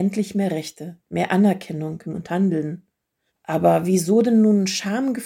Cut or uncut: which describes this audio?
cut